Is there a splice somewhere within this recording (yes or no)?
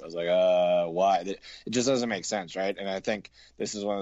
no